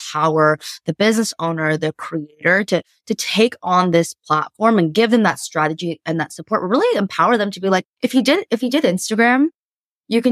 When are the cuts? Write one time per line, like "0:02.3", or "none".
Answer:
0:07.9